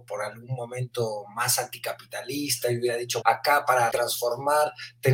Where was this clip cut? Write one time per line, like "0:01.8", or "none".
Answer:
0:03.2
0:03.9